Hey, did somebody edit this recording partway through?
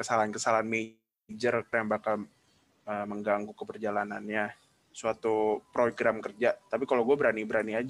yes; 1 cut; at 1.7 s

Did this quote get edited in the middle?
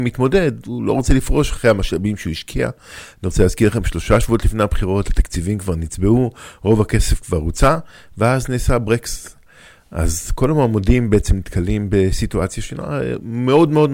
no; 0 cuts

